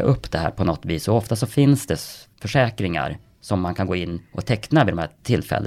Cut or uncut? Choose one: uncut